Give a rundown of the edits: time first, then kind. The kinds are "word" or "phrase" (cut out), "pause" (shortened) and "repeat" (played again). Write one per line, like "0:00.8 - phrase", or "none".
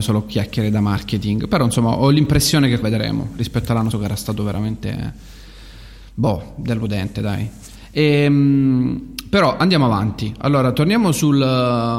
0:02.8 - word
0:03.9 - word